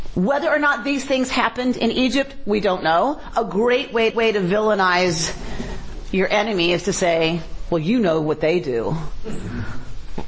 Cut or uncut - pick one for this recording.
cut